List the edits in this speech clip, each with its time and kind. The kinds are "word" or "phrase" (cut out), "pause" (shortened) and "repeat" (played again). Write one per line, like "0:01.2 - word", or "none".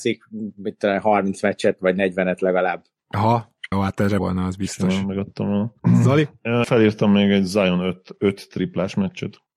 0:03.7 - word
0:04.2 - word
0:05.8 - pause
0:06.6 - word